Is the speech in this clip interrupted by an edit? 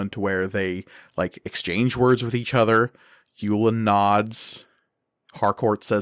no; 0 cuts

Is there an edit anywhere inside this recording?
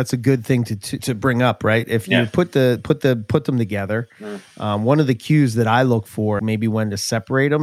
yes; 2 cuts; at 1.0 s, 6.4 s

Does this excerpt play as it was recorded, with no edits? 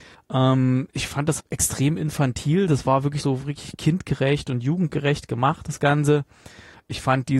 no; 2 cuts; at 1.4 s, 3.2 s

